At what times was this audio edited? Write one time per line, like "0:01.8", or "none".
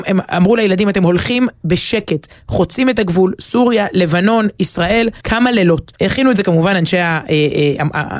0:05.2
0:06.0